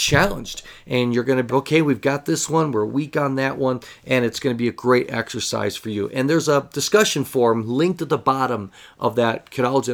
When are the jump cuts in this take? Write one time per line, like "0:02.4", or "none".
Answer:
0:01.5